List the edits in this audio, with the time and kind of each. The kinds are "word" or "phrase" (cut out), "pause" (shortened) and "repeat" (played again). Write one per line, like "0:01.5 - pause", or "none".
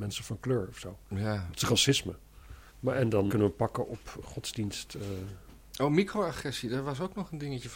0:02.7 - pause
0:03.3 - word
0:04.2 - word